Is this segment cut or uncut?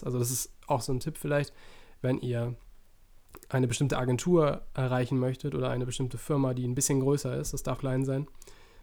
cut